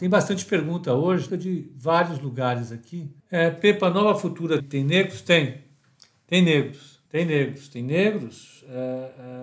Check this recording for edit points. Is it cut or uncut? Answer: cut